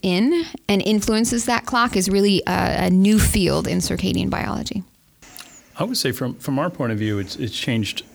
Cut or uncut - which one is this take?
uncut